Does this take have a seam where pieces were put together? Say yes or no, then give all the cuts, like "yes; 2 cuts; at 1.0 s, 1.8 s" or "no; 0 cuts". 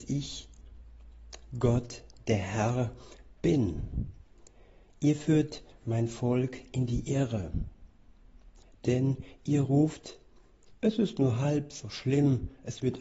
no; 0 cuts